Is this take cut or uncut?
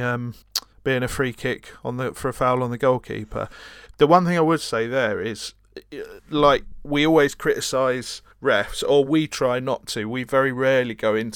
uncut